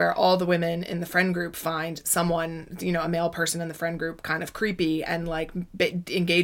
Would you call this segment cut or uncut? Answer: uncut